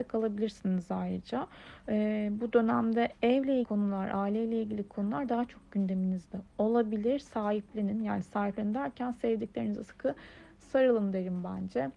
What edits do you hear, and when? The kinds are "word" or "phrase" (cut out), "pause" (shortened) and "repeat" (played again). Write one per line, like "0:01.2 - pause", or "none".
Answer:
0:03.6 - word
0:09.8 - word